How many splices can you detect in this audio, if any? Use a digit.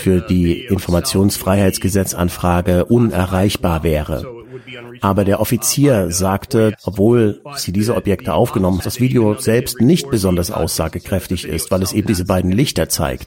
3